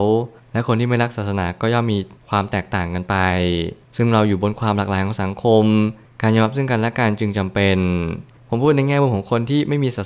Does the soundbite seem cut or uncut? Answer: uncut